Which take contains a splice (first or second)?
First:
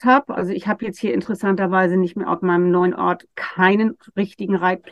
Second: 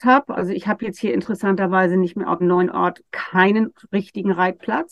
second